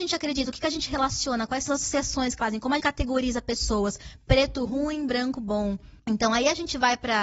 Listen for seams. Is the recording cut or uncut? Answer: cut